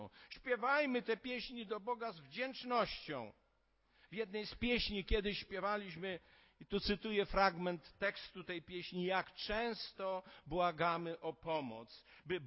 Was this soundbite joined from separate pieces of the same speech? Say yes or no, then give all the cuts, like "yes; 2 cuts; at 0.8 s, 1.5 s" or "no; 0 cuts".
no; 0 cuts